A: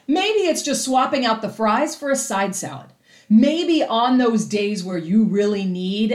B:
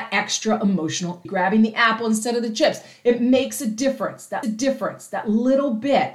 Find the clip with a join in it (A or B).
B